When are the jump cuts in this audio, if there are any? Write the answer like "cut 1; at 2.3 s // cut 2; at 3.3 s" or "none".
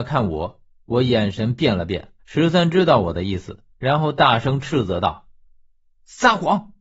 cut 1; at 2.2 s